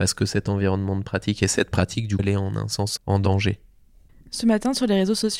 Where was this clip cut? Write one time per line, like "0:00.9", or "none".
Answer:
0:02.2
0:03.0

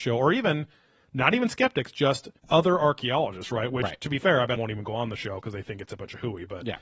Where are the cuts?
0:02.4
0:04.6

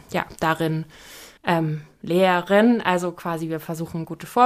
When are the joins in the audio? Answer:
0:01.4

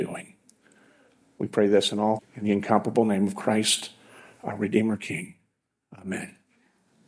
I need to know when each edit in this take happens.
0:02.2

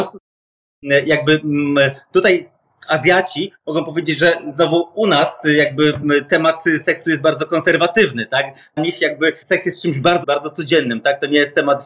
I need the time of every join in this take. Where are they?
0:08.8
0:09.4
0:10.2

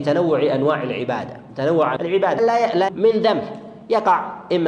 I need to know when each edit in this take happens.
0:02.0
0:02.4
0:02.9

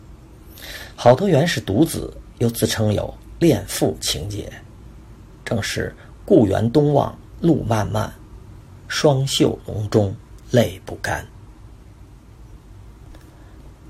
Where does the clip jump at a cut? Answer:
0:10.4

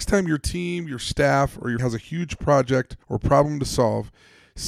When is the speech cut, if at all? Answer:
0:01.8
0:03.0

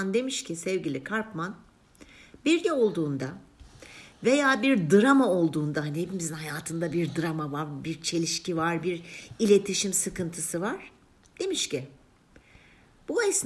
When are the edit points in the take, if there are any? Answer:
0:02.6

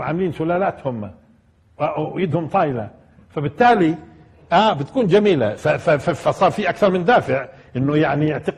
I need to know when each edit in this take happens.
none

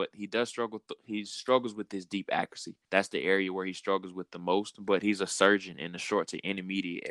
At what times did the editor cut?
0:02.8

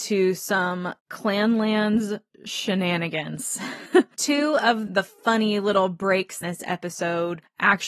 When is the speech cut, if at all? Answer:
0:04.9
0:06.4

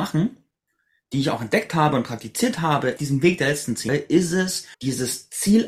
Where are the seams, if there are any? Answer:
0:03.0
0:03.9
0:04.7

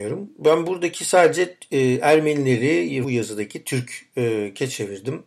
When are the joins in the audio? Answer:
0:03.0

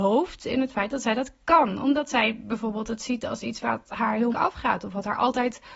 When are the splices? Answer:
0:04.3

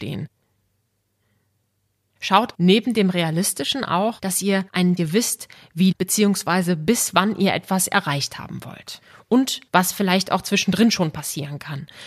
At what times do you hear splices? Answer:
0:02.5
0:05.0
0:05.9
0:09.7

